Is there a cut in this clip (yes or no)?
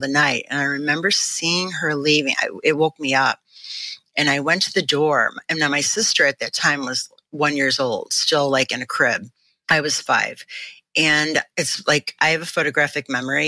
no